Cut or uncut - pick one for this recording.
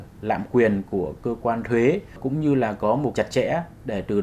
cut